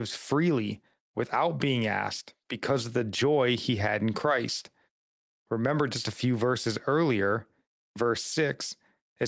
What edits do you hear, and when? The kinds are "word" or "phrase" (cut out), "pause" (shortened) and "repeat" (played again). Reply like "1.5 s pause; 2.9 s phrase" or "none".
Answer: none